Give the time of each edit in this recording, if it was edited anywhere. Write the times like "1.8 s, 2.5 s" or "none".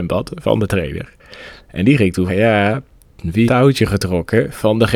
2.3 s, 3.5 s